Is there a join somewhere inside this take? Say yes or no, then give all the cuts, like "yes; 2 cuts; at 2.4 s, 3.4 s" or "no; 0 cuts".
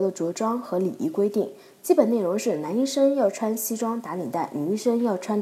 no; 0 cuts